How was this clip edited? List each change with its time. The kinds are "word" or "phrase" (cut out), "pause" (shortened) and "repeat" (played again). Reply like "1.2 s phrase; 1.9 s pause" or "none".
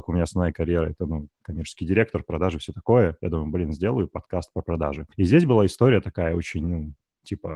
1.3 s pause; 5.1 s pause